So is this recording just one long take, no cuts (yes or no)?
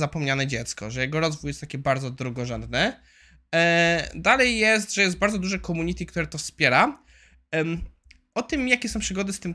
yes